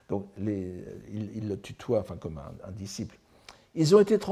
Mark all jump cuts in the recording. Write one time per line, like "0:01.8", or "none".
none